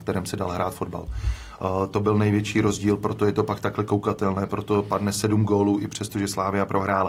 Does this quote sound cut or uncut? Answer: uncut